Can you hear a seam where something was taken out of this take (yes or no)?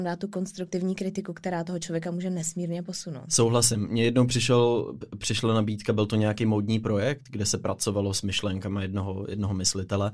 no